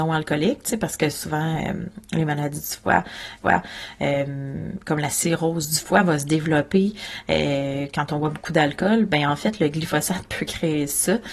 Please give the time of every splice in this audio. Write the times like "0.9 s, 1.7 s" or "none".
3.4 s